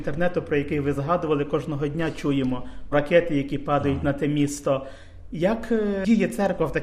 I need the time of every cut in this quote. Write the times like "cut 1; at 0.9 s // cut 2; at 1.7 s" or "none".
cut 1; at 2.9 s